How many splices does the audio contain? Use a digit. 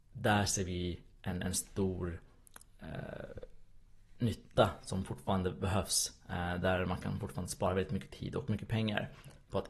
0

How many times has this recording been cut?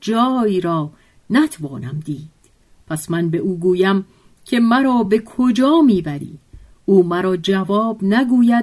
0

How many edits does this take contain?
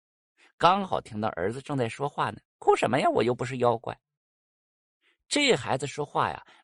1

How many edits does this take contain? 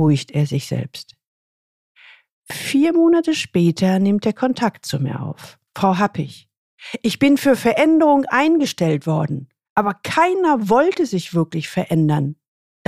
1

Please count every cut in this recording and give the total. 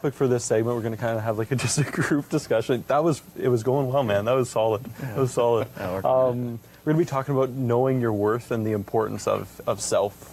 0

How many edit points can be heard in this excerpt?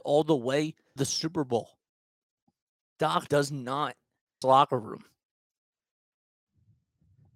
3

